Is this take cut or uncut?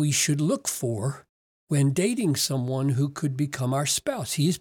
uncut